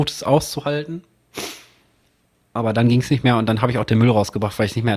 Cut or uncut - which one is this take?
uncut